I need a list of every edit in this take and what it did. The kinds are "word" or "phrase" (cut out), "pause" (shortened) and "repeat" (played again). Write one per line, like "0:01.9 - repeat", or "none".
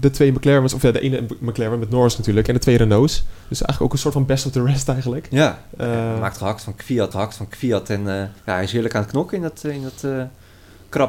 0:03.4 - pause
0:07.1 - repeat
0:08.4 - pause